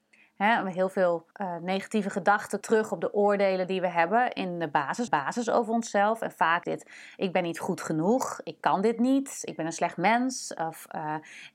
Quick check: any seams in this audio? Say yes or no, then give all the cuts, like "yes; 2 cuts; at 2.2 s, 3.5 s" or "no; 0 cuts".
yes; 4 cuts; at 1.3 s, 2.6 s, 5.1 s, 6.6 s